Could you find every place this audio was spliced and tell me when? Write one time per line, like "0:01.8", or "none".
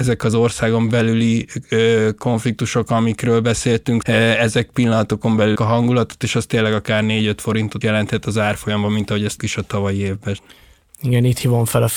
0:04.0
0:05.5
0:07.8
0:09.4

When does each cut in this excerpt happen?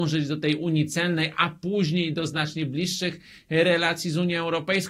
none

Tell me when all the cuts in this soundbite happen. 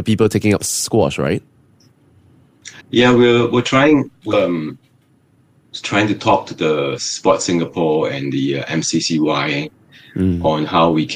0:02.8
0:04.3

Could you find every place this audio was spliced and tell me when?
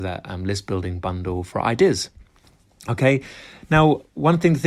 none

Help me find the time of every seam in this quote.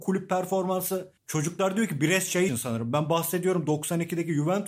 0:01.2
0:02.5

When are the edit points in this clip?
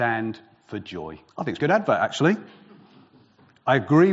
0:01.3
0:01.6

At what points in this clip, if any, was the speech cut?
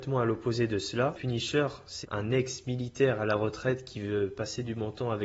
0:01.1
0:02.0

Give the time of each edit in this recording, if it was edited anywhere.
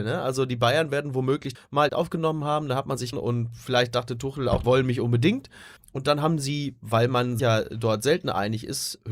0:01.5
0:01.9
0:03.1
0:04.6
0:05.8
0:07.4

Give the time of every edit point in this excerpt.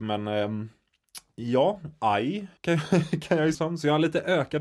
0:02.6
0:03.5

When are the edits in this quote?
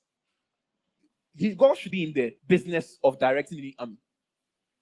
0:01.9
0:02.4

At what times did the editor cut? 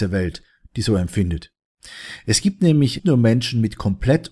0:03.0

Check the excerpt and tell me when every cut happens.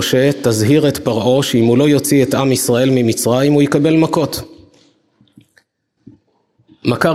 none

